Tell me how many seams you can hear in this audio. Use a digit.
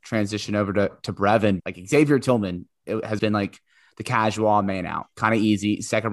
2